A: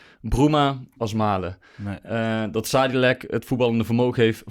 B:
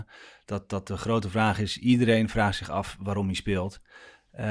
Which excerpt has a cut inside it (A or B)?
A